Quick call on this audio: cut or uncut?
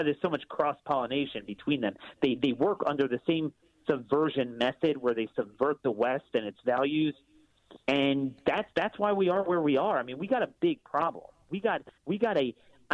cut